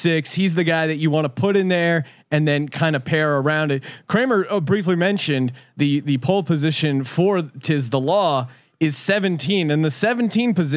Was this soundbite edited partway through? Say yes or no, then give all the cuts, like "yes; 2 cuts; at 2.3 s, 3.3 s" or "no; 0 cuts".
no; 0 cuts